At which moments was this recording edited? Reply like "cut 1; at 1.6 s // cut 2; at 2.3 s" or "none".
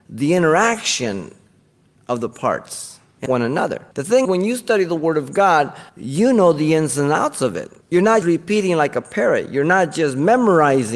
cut 1; at 3.3 s // cut 2; at 3.9 s // cut 3; at 4.2 s // cut 4; at 5.9 s // cut 5; at 7.8 s // cut 6; at 8.2 s